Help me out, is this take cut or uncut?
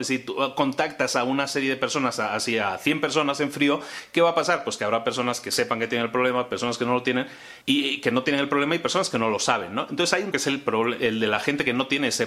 cut